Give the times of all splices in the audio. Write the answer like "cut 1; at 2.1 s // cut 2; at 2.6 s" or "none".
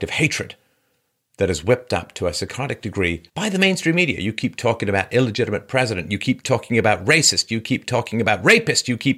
cut 1; at 3.3 s